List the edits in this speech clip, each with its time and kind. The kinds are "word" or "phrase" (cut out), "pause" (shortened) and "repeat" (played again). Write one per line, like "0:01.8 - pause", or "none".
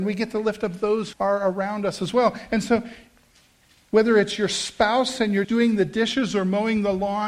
0:01.1 - word
0:05.4 - word